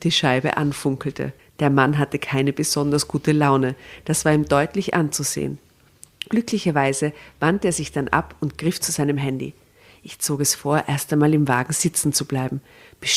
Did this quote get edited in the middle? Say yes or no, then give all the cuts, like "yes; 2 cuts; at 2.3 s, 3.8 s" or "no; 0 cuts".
yes; 1 cut; at 1.4 s